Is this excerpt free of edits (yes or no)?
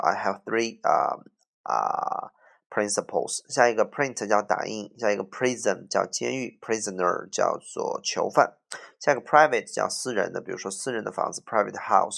yes